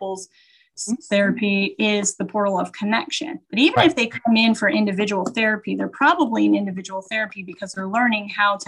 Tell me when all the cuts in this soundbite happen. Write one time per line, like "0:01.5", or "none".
0:03.4